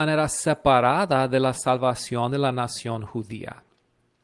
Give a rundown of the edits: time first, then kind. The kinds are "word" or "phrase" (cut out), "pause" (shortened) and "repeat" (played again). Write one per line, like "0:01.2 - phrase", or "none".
none